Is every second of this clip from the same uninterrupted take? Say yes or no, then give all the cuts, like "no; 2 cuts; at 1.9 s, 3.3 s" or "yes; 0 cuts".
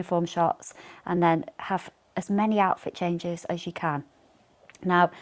yes; 0 cuts